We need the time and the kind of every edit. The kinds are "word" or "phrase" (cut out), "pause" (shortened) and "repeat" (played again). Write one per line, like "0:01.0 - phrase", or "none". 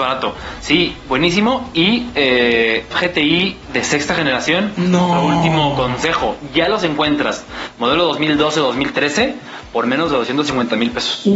0:02.9 - phrase